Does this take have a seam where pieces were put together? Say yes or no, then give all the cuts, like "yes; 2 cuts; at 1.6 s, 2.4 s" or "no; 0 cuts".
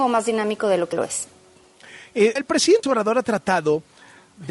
yes; 3 cuts; at 0.9 s, 2.4 s, 2.8 s